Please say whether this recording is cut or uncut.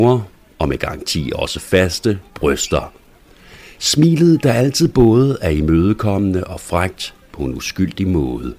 cut